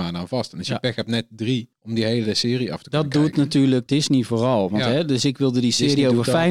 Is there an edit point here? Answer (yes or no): yes